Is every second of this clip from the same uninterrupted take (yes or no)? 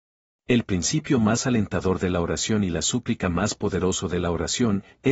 yes